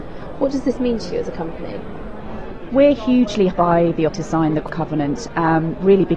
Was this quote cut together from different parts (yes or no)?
yes